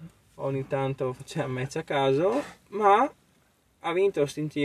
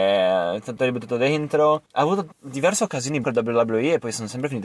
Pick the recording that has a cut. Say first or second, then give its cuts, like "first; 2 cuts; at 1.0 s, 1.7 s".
second; 3 cuts; at 1.9 s, 2.3 s, 3.2 s